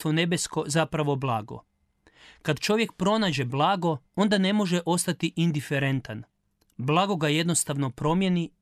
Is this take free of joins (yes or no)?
no